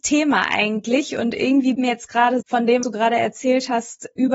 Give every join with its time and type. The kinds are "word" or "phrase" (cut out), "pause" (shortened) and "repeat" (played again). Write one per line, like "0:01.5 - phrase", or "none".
0:01.8 - word
0:02.4 - word
0:02.8 - word